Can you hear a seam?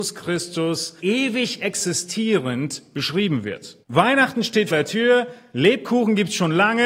yes; 3 cuts; at 1.0 s, 3.8 s, 4.7 s

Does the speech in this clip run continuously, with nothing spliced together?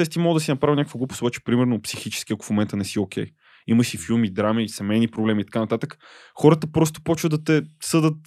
yes; 0 cuts

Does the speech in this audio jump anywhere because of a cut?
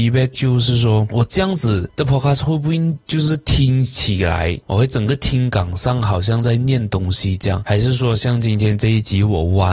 yes; 2 cuts; at 3.0 s, 4.6 s

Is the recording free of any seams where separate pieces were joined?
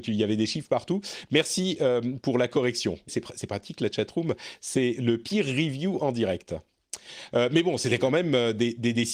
no; 1 cut; at 3.1 s

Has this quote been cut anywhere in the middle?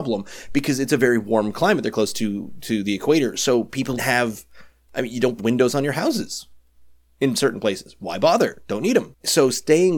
yes; 3 cuts; at 1.9 s, 4.0 s, 5.4 s

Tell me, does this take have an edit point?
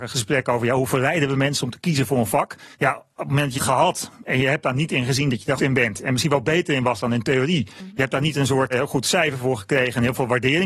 yes; 4 cuts; at 2.7 s, 3.6 s, 5.6 s, 8.7 s

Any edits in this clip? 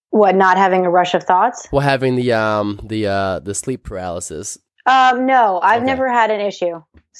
yes; 1 cut; at 4.7 s

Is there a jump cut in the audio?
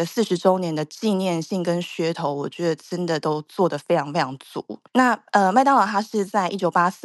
yes; 1 cut; at 4.9 s

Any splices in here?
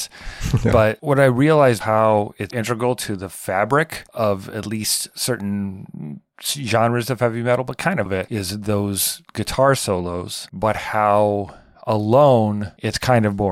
yes; 3 cuts; at 1.8 s, 2.5 s, 8.1 s

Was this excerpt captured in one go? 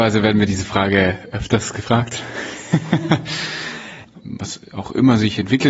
yes; 0 cuts

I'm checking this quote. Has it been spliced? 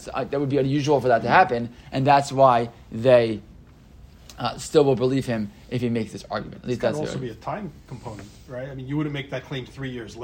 no; 0 cuts

